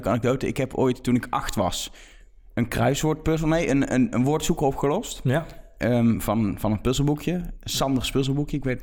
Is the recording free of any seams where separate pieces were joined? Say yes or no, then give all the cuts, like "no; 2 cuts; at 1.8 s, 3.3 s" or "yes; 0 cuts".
yes; 0 cuts